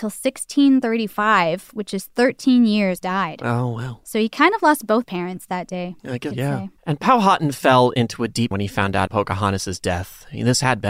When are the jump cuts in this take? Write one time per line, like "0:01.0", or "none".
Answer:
0:03.0
0:04.0
0:05.0
0:06.0
0:06.3
0:06.8
0:08.5
0:09.1